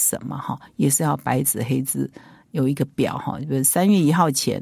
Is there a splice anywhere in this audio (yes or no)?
no